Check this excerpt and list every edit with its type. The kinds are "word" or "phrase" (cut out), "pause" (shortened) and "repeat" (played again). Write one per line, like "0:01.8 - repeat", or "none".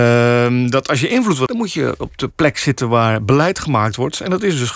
0:01.5 - word